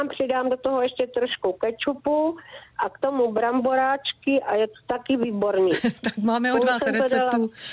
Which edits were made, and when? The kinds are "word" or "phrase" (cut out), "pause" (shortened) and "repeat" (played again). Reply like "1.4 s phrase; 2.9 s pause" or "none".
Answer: none